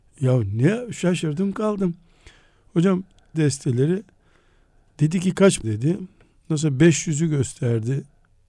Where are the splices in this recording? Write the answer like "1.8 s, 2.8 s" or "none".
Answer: 3.3 s, 5.6 s

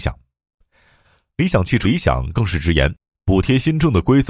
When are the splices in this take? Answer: 1.8 s

